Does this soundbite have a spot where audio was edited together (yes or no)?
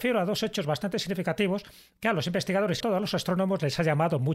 yes